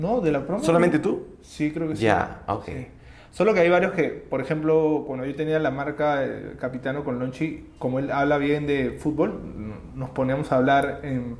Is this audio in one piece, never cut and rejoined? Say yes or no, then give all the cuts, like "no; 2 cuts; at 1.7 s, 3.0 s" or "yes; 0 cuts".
yes; 0 cuts